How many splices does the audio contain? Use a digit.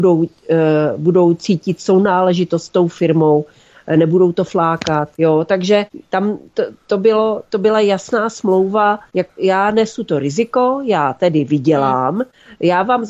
1